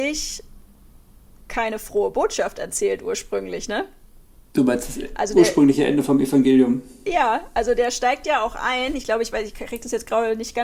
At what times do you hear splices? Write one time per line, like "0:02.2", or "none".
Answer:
none